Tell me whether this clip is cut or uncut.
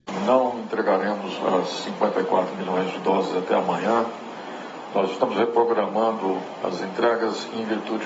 uncut